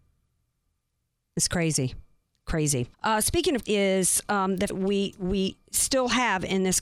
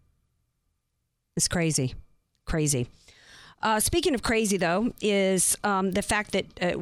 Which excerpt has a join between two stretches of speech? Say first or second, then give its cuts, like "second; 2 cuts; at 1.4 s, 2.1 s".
first; 3 cuts; at 2.9 s, 3.6 s, 4.7 s